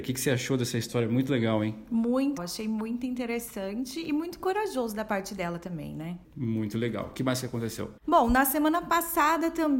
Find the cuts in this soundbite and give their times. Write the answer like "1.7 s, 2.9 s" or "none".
2.4 s, 8.0 s